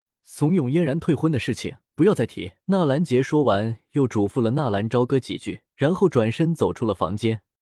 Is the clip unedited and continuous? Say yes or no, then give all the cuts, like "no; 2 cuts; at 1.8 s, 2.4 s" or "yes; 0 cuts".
no; 3 cuts; at 1.9 s, 2.6 s, 5.7 s